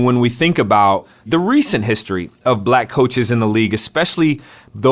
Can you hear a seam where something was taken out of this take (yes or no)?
no